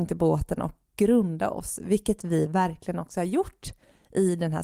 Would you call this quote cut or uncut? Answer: uncut